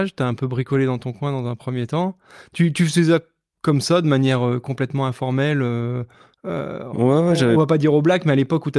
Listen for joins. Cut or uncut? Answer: uncut